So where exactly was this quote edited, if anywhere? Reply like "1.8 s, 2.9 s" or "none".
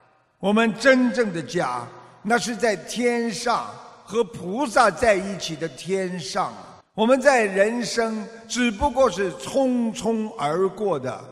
6.8 s